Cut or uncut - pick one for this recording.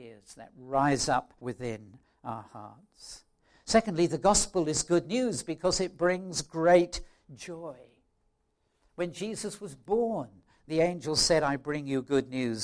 cut